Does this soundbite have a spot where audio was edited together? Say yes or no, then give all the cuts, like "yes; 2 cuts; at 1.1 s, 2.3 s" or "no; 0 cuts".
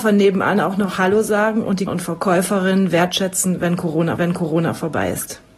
yes; 2 cuts; at 1.9 s, 4.2 s